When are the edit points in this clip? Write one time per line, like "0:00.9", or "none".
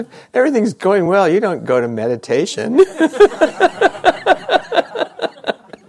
none